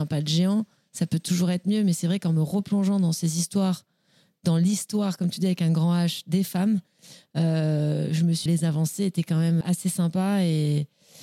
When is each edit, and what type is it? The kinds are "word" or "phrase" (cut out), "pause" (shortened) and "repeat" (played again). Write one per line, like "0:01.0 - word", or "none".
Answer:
0:08.5 - phrase
0:09.6 - word